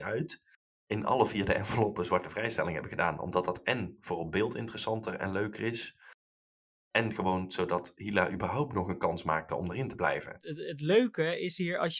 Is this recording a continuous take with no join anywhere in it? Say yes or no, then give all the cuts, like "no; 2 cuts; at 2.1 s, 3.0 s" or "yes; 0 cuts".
yes; 0 cuts